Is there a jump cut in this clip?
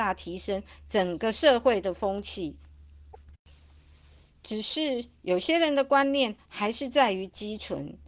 no; 0 cuts

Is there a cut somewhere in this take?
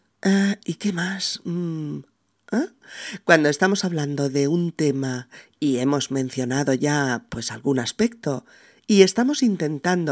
no; 0 cuts

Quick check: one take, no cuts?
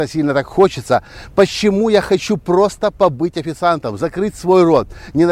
yes; 0 cuts

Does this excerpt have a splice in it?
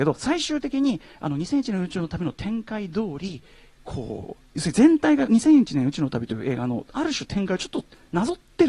no; 0 cuts

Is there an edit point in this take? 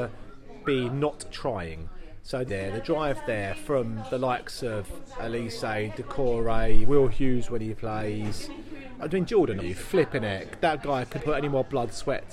yes; 4 cuts; at 2.5 s, 9.0 s, 9.6 s, 11.2 s

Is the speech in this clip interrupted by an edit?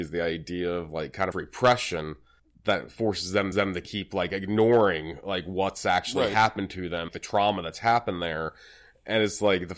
yes; 4 cuts; at 1.3 s, 2.4 s, 3.5 s, 7.1 s

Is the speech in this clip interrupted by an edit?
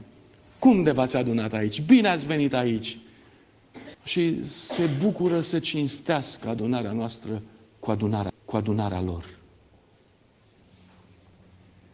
yes; 2 cuts; at 3.9 s, 8.3 s

